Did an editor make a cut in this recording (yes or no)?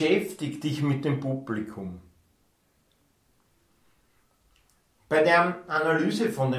no